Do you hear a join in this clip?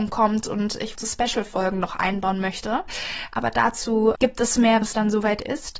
yes; 3 cuts; at 0.9 s, 4.1 s, 4.8 s

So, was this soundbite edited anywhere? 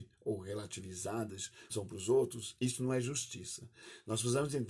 yes; 1 cut; at 1.7 s

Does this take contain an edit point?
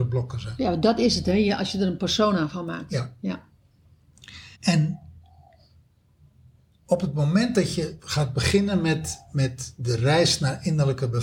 yes; 1 cut; at 4.5 s

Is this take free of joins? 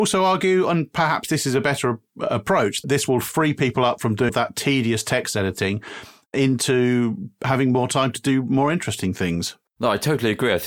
no; 2 cuts; at 2.8 s, 4.3 s

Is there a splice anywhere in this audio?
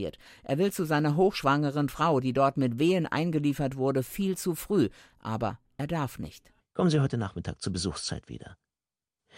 no; 0 cuts

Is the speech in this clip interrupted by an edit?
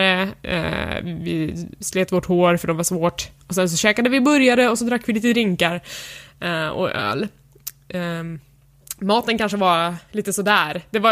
no; 0 cuts

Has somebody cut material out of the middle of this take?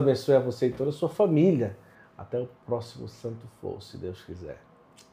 no; 0 cuts

